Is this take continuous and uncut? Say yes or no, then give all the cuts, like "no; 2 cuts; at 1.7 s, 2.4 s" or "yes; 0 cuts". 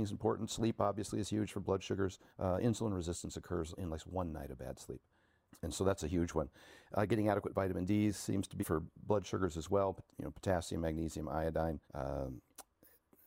no; 5 cuts; at 2.3 s, 3.8 s, 8.6 s, 10.1 s, 11.8 s